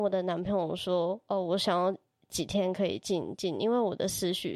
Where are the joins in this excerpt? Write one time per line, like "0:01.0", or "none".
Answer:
none